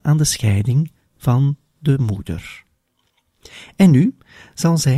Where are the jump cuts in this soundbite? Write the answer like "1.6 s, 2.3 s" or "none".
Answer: none

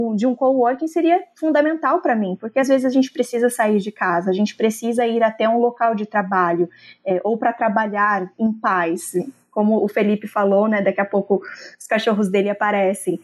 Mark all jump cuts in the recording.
none

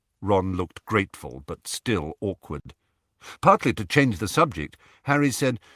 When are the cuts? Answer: none

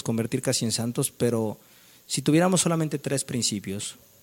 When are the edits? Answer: none

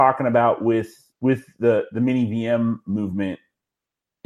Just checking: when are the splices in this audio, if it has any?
1.1 s

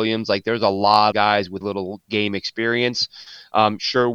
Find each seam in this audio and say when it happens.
1.1 s, 1.6 s

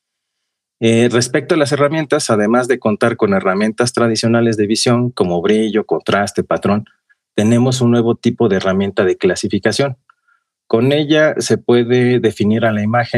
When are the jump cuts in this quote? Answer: none

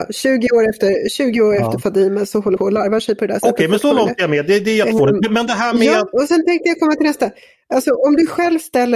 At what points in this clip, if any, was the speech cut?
2.6 s, 6.1 s

